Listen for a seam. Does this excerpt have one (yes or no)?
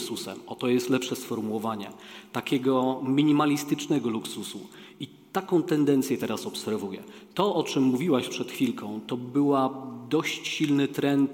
no